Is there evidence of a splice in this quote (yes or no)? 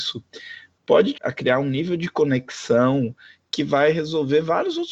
yes